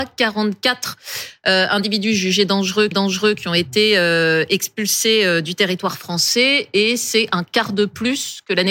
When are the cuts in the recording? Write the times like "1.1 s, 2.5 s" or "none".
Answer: 2.9 s